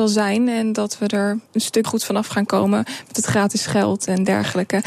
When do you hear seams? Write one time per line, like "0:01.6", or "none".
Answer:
0:01.5
0:01.8